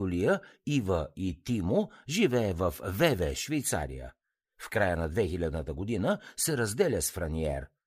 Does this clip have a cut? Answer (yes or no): no